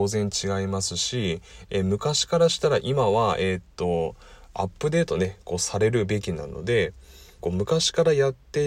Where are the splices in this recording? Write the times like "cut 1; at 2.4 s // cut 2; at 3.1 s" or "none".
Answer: cut 1; at 7.4 s